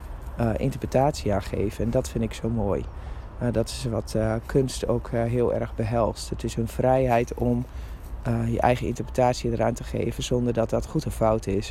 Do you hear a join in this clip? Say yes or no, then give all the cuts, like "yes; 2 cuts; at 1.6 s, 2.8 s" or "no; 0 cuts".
no; 0 cuts